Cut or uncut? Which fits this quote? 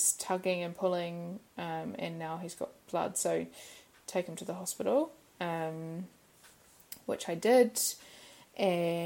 uncut